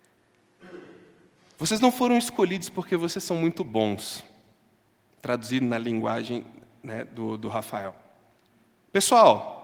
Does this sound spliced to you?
no; 0 cuts

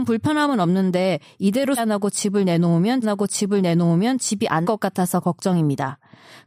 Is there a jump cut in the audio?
yes; 3 cuts; at 1.8 s, 3.0 s, 4.6 s

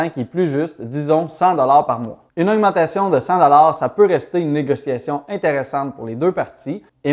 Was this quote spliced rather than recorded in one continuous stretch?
yes; 1 cut; at 2.3 s

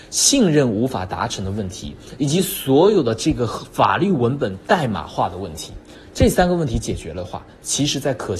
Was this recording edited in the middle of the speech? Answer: no; 0 cuts

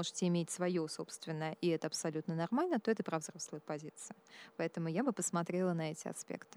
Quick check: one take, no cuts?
yes; 0 cuts

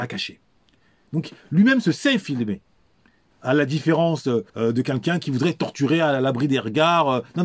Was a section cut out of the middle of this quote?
yes; 1 cut; at 4.5 s

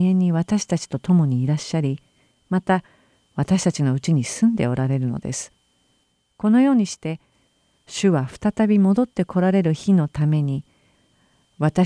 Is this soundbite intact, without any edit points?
yes; 0 cuts

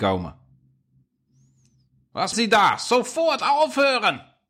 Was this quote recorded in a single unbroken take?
no; 1 cut; at 2.3 s

